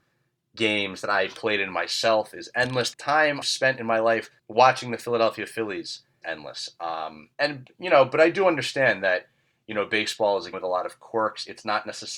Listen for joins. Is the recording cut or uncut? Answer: cut